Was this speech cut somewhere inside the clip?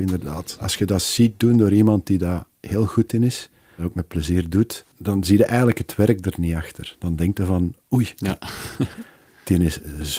yes; 1 cut; at 4.9 s

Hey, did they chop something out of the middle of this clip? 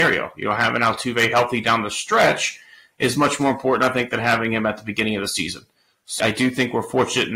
yes; 1 cut; at 6.2 s

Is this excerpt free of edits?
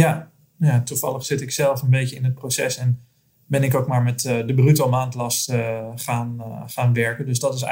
yes; 0 cuts

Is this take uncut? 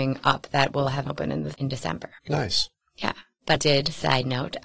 no; 4 cuts; at 1.1 s, 1.5 s, 2.2 s, 3.6 s

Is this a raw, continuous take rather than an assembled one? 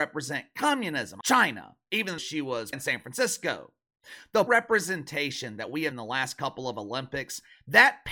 no; 5 cuts; at 1.2 s, 2.2 s, 2.7 s, 4.5 s, 5.9 s

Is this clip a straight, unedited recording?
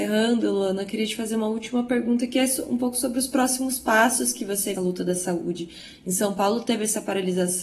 no; 1 cut; at 4.7 s

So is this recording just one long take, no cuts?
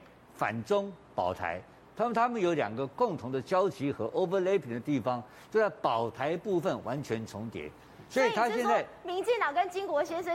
yes; 0 cuts

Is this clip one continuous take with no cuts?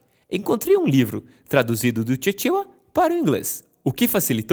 yes; 0 cuts

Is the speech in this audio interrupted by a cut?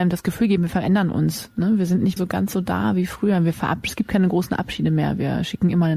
yes; 1 cut; at 2.2 s

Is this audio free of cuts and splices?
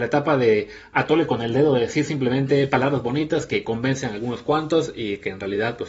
yes; 0 cuts

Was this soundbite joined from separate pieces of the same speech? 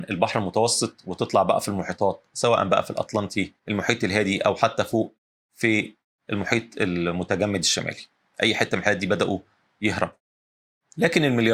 yes; 1 cut; at 3.6 s

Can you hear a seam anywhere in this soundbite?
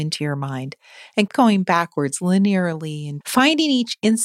yes; 2 cuts; at 1.3 s, 3.2 s

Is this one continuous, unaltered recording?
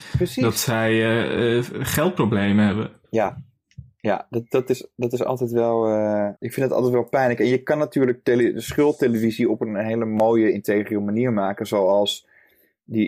no; 1 cut; at 6.4 s

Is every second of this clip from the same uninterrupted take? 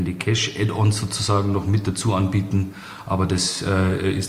yes; 0 cuts

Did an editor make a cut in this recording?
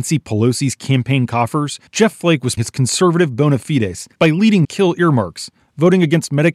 yes; 4 cuts; at 1.9 s, 2.6 s, 4.1 s, 4.6 s

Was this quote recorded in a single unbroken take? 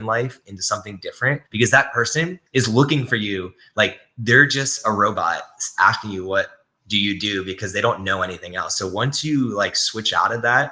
no; 2 cuts; at 1.5 s, 2.5 s

